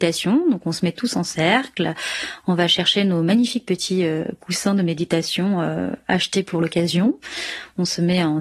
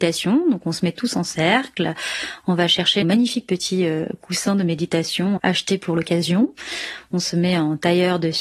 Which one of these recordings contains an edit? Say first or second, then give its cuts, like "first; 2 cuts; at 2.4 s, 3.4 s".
second; 2 cuts; at 3.0 s, 5.4 s